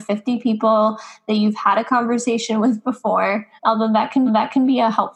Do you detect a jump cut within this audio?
yes; 2 cuts; at 3.6 s, 4.3 s

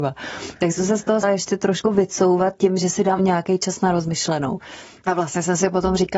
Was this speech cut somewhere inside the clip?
yes; 3 cuts; at 1.2 s, 1.8 s, 3.2 s

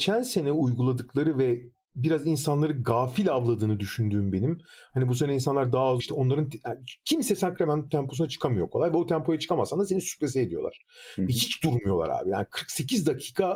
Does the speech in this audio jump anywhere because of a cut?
yes; 2 cuts; at 6.0 s, 8.7 s

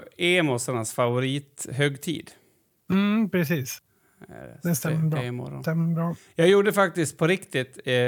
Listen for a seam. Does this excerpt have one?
no; 0 cuts

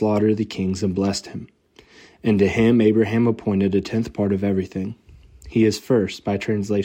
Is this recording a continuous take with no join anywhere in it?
yes; 0 cuts

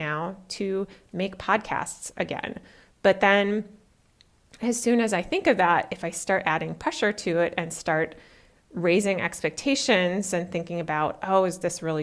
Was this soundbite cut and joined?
no; 0 cuts

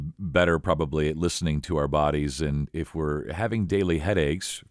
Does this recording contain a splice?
no; 0 cuts

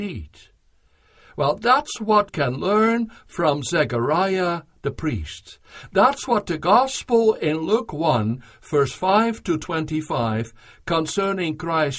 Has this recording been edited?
yes; 1 cut; at 2.3 s

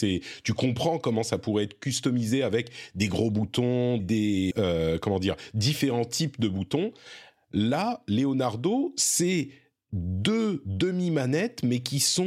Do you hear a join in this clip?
yes; 2 cuts; at 4.0 s, 4.5 s

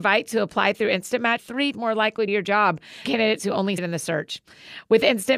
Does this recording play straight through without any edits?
no; 5 cuts; at 1.4 s, 1.7 s, 2.3 s, 3.0 s, 3.8 s

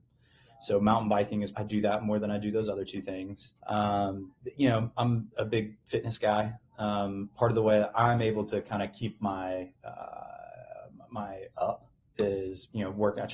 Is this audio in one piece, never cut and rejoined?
no; 5 cuts; at 1.5 s, 3.6 s, 5.3 s, 9.7 s, 11.5 s

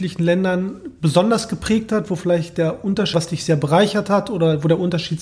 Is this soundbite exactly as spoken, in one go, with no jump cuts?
no; 1 cut; at 3.1 s

